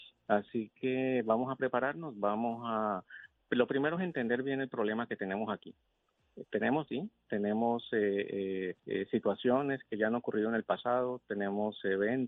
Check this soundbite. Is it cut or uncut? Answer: cut